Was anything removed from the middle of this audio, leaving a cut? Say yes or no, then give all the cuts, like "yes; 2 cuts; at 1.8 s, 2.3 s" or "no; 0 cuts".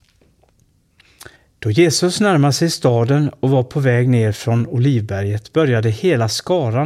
yes; 1 cut; at 1.3 s